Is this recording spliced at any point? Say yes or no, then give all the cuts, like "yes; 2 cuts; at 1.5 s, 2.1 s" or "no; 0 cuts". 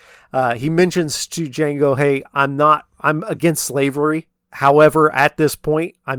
yes; 1 cut; at 2.9 s